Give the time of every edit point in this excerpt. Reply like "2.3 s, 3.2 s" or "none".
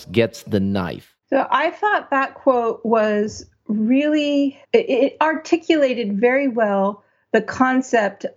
1.2 s, 4.6 s